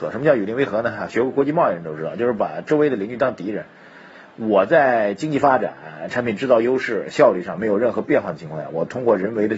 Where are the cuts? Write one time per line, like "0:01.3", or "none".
none